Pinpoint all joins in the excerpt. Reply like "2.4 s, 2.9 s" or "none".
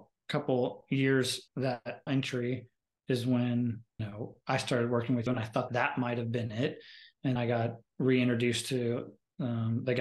1.5 s, 2.1 s, 4.0 s, 5.3 s, 5.7 s, 7.4 s